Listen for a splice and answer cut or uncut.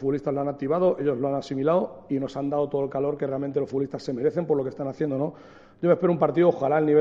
uncut